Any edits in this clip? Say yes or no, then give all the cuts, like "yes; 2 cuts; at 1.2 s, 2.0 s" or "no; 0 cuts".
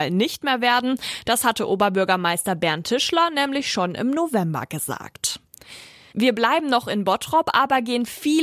no; 0 cuts